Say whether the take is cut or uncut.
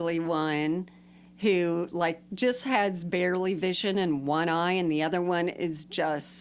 uncut